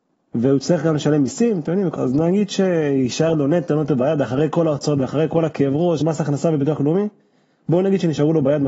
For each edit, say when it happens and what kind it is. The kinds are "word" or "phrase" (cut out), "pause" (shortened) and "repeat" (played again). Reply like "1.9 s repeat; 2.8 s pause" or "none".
2.0 s word; 6.0 s word